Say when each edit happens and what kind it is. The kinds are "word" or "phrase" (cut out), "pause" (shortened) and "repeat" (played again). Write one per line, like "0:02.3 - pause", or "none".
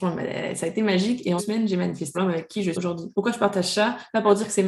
0:01.4 - word
0:02.1 - word
0:02.7 - word
0:03.1 - pause